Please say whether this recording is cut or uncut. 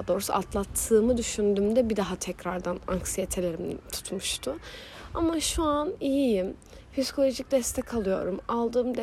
uncut